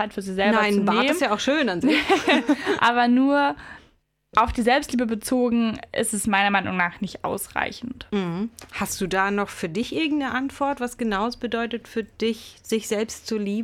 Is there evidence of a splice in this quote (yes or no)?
no